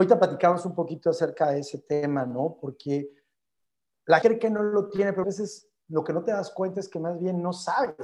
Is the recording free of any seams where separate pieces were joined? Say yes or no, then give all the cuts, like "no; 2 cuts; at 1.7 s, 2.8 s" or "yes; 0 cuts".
no; 2 cuts; at 4.2 s, 5.2 s